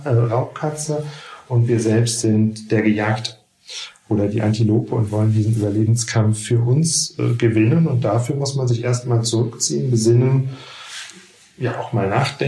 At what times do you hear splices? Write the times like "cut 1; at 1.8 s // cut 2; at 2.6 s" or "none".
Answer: none